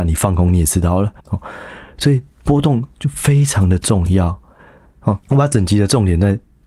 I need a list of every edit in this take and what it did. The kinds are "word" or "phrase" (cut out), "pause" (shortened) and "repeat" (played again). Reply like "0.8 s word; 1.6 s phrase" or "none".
1.2 s pause; 2.3 s pause; 5.2 s pause